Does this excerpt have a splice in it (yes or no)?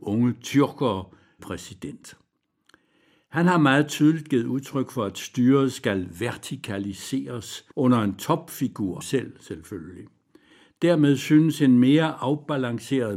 yes